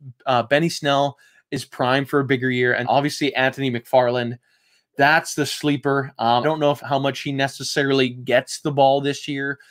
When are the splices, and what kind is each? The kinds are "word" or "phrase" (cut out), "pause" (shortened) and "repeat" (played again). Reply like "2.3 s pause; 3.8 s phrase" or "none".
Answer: 2.8 s word; 6.4 s word; 6.8 s word